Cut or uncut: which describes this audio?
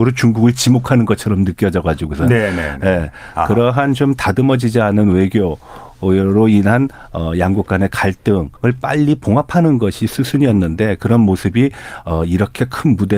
cut